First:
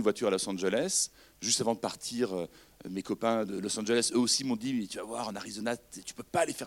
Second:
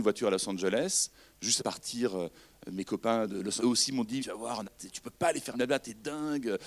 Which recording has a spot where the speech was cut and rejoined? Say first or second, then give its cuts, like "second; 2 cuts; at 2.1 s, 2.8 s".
second; 5 cuts; at 1.6 s, 3.6 s, 4.2 s, 4.6 s, 5.5 s